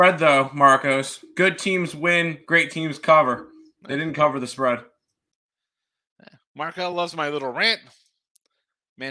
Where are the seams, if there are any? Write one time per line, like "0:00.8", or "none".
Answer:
none